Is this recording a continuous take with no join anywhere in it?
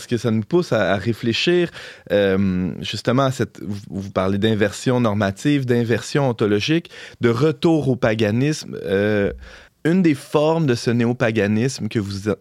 no; 1 cut; at 9.7 s

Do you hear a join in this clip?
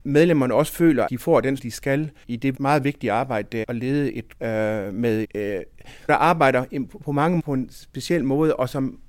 yes; 9 cuts; at 1.1 s, 1.6 s, 2.2 s, 2.5 s, 3.6 s, 4.4 s, 5.2 s, 6.1 s, 7.4 s

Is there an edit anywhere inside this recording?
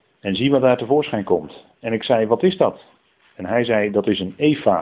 no; 0 cuts

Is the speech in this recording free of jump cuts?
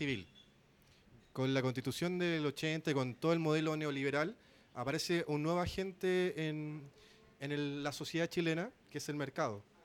yes; 0 cuts

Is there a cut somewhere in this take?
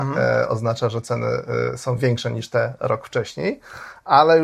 no; 0 cuts

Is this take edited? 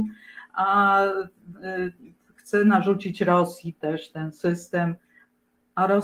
no; 0 cuts

